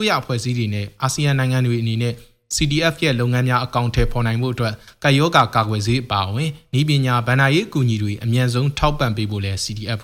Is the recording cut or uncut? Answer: uncut